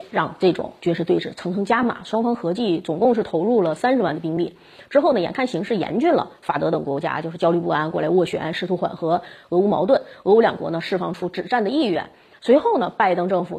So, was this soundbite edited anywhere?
no; 0 cuts

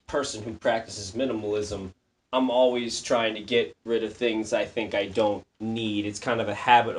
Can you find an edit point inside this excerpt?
no; 0 cuts

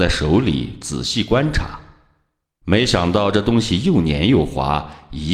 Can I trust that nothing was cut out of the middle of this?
yes; 0 cuts

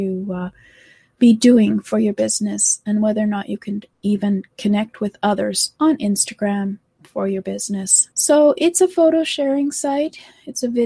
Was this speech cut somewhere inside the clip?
yes; 3 cuts; at 3.9 s, 5.8 s, 8.1 s

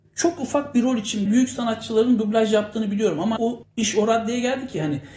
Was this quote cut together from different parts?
yes; 2 cuts; at 1.3 s, 3.4 s

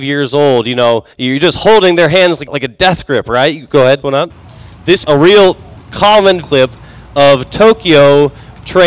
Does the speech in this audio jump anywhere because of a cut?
yes; 5 cuts; at 1.1 s, 2.5 s, 4.0 s, 5.0 s, 6.4 s

